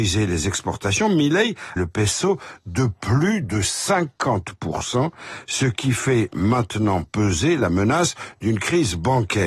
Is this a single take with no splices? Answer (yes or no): no